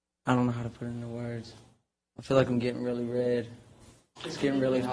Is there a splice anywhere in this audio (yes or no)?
no